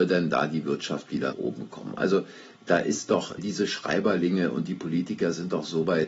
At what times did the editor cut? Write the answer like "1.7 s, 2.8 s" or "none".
1.3 s, 3.4 s